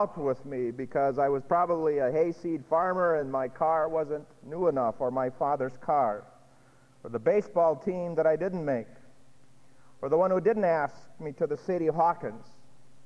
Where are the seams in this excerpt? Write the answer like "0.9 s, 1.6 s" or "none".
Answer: none

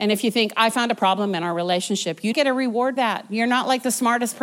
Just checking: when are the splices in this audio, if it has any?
2.3 s, 3.0 s

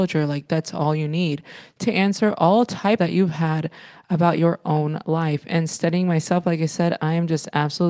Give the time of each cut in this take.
3.0 s

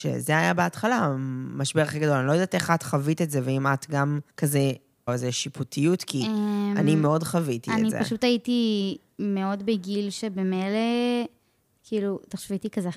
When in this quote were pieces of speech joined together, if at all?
4.3 s, 5.1 s

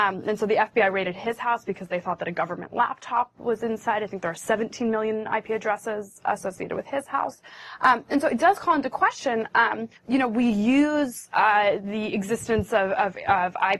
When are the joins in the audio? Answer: 10.0 s

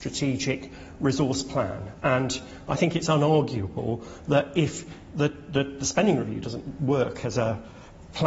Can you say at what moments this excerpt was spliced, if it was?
none

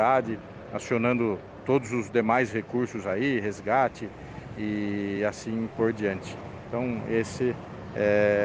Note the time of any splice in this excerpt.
none

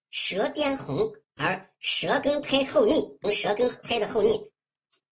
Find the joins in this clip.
3.2 s

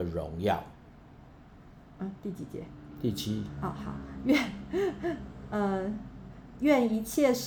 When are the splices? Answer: none

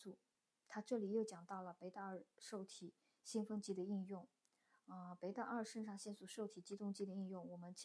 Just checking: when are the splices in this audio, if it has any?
none

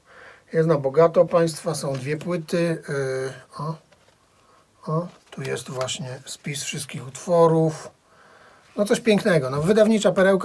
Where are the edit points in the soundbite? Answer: 1.3 s, 5.2 s

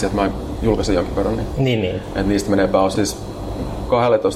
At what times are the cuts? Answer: 2.9 s

